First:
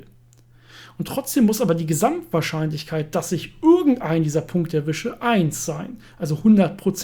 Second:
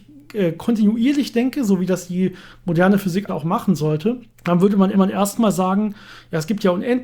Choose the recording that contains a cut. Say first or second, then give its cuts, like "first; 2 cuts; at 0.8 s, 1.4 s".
second; 3 cuts; at 3.3 s, 4.3 s, 4.9 s